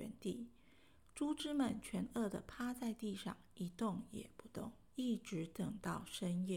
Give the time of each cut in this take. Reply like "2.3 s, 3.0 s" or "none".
4.9 s